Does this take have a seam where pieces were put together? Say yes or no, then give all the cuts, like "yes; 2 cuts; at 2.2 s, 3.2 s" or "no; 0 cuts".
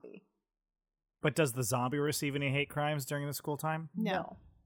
no; 0 cuts